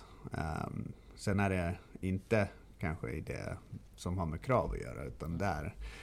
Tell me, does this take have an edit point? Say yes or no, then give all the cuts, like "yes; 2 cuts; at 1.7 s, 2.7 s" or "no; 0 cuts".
no; 0 cuts